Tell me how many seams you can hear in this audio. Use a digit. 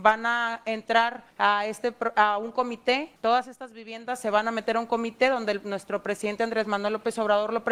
2